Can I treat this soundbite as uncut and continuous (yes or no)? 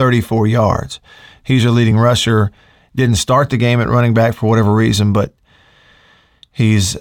yes